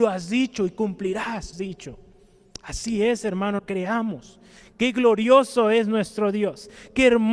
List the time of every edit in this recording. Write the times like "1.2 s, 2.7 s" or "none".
1.5 s, 3.6 s